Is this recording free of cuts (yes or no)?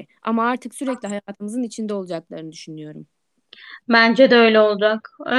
yes